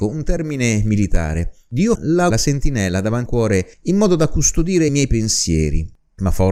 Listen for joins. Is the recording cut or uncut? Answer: cut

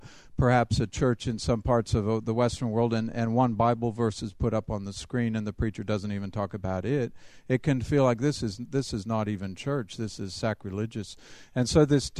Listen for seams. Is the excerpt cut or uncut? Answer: uncut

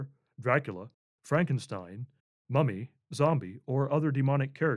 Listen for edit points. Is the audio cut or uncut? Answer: uncut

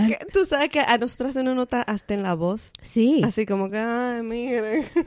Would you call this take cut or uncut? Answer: uncut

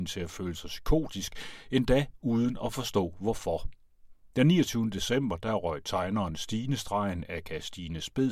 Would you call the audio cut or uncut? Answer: uncut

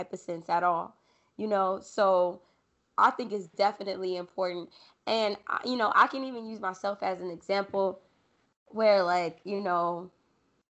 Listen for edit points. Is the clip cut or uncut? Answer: uncut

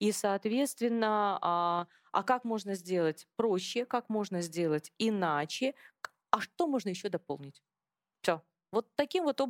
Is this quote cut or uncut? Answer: uncut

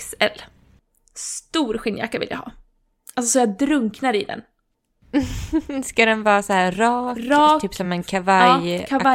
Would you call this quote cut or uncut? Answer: uncut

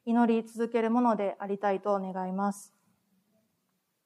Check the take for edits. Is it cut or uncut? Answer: uncut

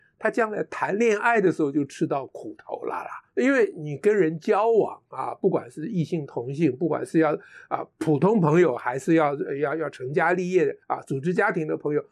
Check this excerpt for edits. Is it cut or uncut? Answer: cut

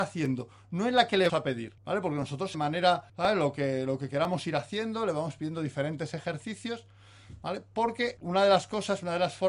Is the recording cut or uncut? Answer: cut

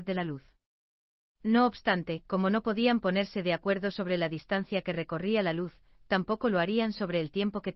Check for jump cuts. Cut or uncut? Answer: uncut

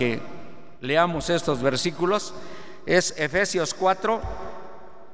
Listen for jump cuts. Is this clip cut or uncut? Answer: uncut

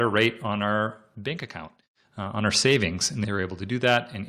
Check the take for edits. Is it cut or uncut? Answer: uncut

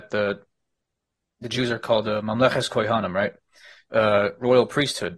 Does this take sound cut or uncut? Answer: uncut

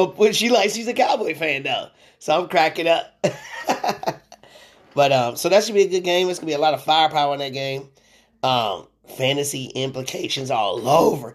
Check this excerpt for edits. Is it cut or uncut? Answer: uncut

